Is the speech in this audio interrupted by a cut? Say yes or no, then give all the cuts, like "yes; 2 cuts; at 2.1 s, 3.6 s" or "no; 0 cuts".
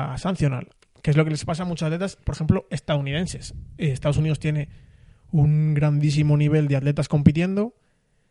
no; 0 cuts